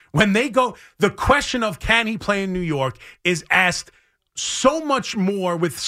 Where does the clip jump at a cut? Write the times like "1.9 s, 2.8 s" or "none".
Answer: none